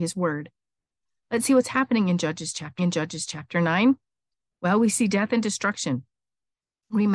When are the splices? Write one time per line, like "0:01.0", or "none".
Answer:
0:02.8